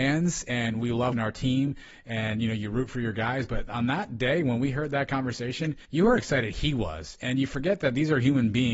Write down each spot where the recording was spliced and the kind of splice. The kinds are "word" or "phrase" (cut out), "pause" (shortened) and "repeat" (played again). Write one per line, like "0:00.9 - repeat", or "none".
0:01.1 - word
0:05.8 - pause
0:06.2 - word